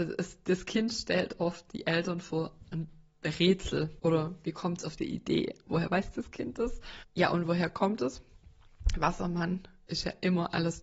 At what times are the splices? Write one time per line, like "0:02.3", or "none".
0:05.0